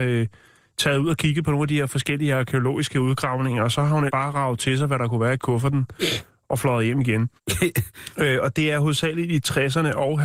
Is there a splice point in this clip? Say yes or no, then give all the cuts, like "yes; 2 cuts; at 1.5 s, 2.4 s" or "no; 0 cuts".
yes; 2 cuts; at 4.1 s, 7.4 s